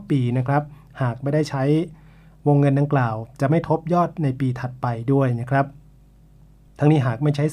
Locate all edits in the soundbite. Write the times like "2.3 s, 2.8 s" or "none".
none